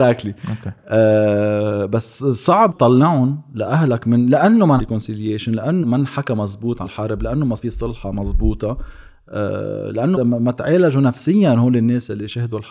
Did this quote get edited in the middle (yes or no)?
yes